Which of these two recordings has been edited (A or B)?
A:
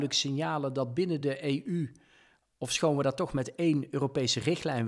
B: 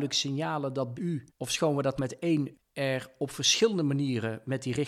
B